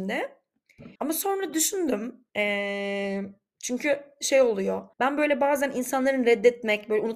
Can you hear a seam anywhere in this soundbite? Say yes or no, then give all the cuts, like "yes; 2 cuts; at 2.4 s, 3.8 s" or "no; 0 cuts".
yes; 3 cuts; at 1.0 s, 2.3 s, 4.9 s